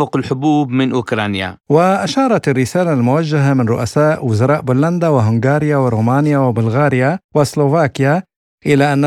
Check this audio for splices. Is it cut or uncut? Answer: cut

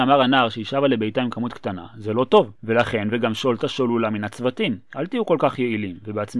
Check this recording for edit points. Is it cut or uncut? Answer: cut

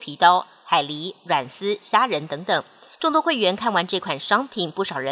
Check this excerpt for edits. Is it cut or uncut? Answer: uncut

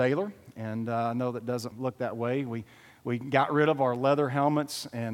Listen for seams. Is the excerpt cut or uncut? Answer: cut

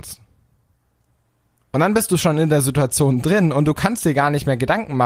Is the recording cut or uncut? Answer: uncut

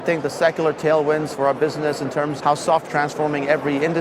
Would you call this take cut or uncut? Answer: cut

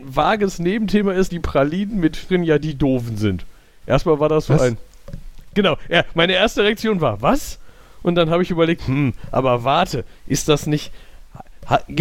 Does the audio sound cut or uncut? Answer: cut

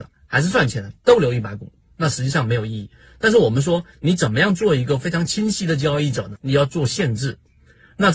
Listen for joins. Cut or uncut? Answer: uncut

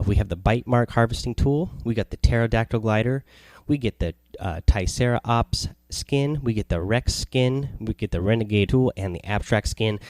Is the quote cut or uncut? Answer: cut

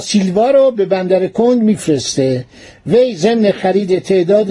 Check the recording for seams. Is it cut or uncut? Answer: uncut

